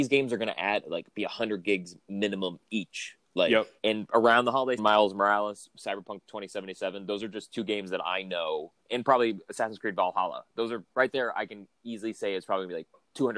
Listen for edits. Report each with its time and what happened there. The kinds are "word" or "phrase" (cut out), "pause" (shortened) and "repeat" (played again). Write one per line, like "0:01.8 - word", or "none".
0:03.8 - pause
0:04.8 - phrase
0:10.9 - pause